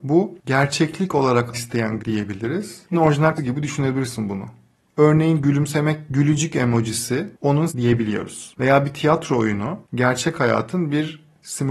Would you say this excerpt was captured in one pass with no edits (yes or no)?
no